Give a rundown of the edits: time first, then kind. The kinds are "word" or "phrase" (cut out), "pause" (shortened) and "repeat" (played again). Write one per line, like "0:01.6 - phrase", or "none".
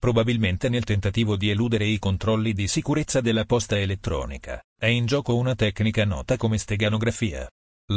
0:04.7 - pause